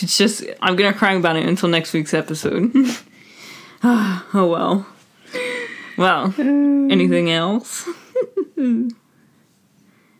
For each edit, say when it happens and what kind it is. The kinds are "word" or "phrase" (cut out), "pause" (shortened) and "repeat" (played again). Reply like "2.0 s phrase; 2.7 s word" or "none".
none